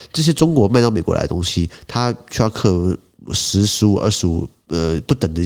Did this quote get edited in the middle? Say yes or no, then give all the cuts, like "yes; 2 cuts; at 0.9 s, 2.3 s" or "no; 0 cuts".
no; 0 cuts